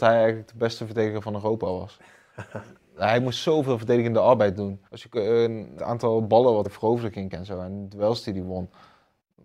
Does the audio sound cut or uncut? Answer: cut